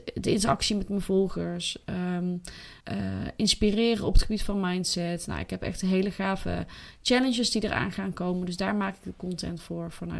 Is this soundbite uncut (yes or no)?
no